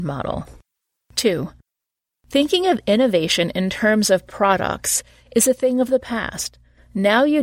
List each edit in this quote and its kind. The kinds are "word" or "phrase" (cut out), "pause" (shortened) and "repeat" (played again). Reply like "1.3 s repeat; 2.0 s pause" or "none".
none